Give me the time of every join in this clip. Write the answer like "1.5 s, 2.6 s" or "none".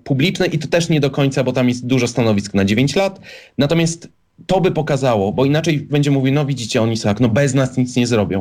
5.9 s, 7.0 s